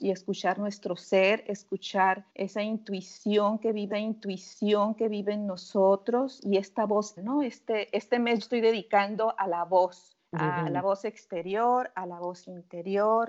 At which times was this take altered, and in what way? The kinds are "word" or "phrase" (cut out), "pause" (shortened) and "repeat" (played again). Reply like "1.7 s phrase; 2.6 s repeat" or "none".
2.3 s pause; 3.9 s repeat; 7.2 s word; 8.4 s phrase; 10.3 s pause